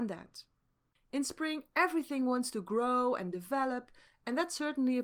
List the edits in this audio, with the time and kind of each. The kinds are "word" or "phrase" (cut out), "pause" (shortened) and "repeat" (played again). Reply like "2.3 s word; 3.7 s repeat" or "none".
none